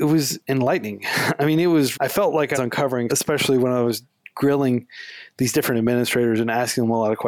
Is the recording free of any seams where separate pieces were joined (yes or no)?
no